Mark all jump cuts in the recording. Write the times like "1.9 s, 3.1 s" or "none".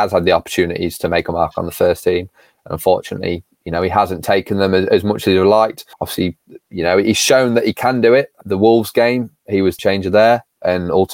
5.9 s, 8.4 s, 9.8 s